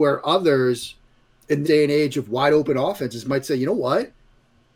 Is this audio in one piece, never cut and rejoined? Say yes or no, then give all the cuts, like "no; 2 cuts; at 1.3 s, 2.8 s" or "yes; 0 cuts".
no; 1 cut; at 1.6 s